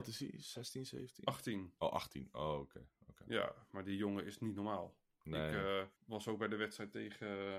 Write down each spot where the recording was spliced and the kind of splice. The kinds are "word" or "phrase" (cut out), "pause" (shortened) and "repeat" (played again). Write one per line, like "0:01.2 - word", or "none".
0:06.0 - pause